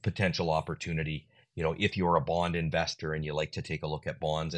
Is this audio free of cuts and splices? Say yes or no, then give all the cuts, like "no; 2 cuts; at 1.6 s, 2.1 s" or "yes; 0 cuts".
yes; 0 cuts